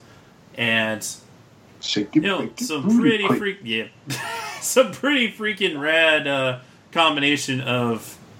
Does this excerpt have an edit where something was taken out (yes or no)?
no